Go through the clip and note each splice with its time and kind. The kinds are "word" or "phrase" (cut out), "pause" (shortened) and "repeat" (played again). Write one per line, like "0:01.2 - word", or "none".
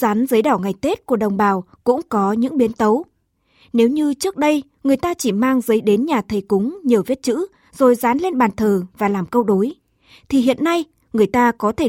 none